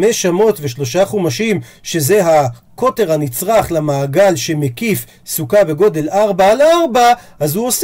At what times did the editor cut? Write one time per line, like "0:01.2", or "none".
none